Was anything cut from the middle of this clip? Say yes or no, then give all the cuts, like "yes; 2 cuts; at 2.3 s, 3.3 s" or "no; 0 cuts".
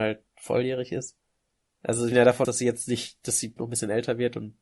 yes; 3 cuts; at 2.1 s, 2.4 s, 3.6 s